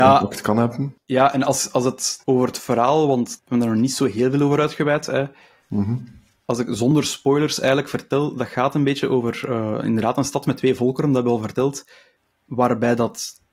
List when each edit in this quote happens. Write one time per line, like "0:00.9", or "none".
0:02.2
0:03.4